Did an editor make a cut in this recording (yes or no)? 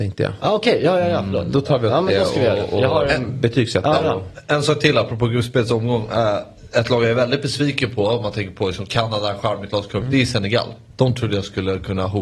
no